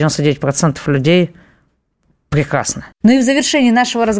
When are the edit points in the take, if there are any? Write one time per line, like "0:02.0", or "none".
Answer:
0:02.9